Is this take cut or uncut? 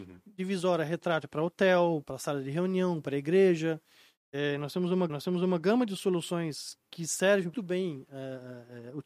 cut